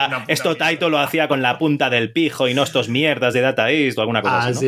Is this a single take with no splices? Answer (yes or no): yes